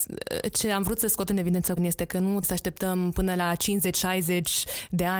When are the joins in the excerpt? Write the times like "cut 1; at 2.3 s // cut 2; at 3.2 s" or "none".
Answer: cut 1; at 1.8 s // cut 2; at 2.4 s